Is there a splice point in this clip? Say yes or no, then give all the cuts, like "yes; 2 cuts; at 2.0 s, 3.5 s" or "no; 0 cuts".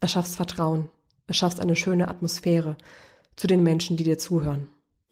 no; 0 cuts